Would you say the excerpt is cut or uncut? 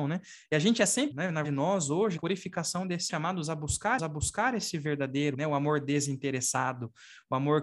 cut